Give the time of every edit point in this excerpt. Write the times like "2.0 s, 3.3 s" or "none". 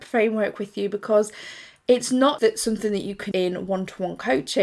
2.4 s, 3.3 s